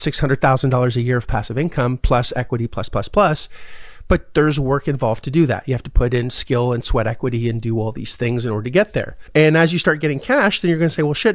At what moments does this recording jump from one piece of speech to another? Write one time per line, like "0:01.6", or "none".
none